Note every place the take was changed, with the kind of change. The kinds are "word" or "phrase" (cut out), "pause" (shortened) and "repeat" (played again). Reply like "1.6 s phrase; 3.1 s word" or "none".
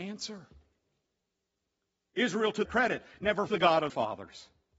2.6 s word; 3.5 s word; 3.9 s word